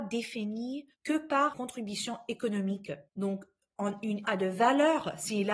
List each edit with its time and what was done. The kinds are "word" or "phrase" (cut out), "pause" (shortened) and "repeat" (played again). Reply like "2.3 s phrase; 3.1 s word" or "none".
0.9 s pause; 1.5 s word; 3.1 s pause; 4.2 s phrase